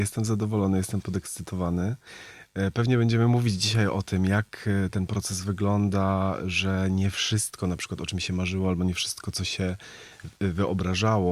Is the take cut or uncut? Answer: uncut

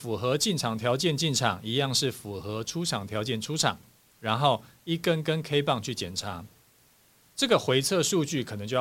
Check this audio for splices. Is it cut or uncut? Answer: uncut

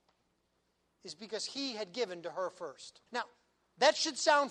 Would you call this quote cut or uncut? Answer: cut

